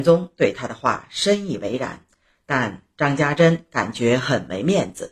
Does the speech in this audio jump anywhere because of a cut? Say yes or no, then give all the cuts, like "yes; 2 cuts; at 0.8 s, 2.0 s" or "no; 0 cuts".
no; 0 cuts